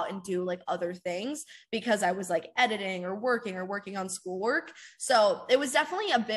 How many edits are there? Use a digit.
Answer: 0